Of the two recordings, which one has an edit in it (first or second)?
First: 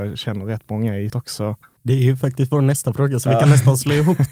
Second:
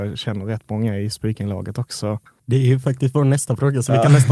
first